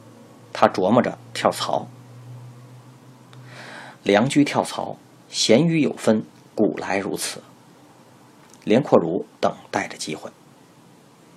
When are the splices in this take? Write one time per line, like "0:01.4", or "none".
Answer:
0:04.0
0:09.3